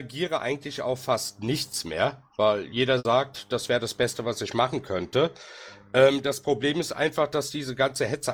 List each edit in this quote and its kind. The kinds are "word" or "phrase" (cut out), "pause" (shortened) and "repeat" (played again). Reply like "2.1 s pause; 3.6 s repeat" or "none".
none

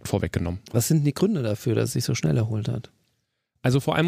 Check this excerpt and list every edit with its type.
none

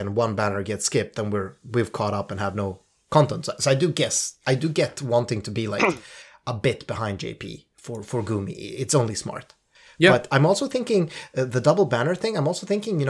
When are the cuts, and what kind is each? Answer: none

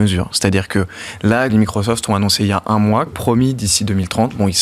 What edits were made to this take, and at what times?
1.5 s word; 3.1 s word

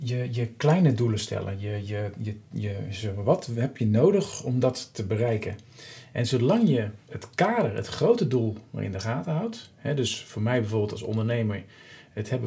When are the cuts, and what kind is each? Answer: none

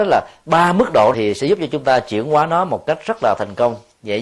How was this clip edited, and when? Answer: 1.1 s word

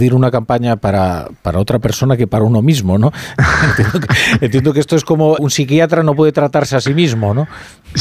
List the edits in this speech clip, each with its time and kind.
5.4 s word

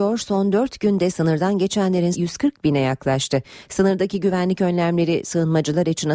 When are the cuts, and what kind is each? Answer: 2.1 s word

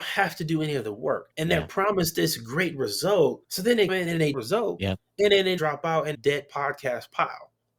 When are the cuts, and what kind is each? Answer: 1.3 s pause; 3.4 s pause; 3.9 s word; 4.3 s phrase; 5.6 s word; 6.1 s phrase

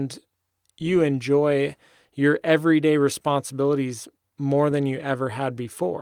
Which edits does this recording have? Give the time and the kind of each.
none

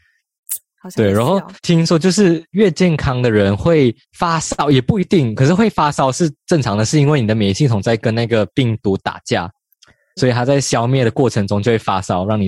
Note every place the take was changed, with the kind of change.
1.6 s pause; 4.0 s pause; 10.2 s word

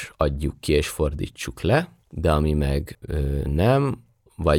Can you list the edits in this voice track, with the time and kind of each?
2.0 s pause

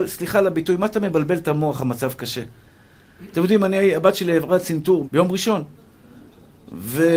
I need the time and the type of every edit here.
5.0 s word

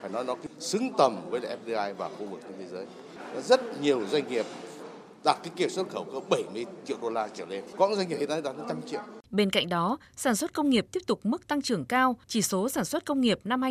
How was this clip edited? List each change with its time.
9.3 s pause; 12.2 s pause

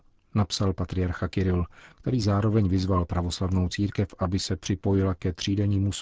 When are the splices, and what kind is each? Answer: none

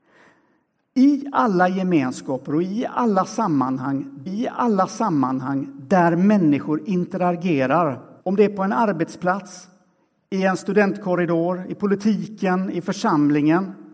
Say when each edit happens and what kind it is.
4.3 s repeat; 8.2 s pause

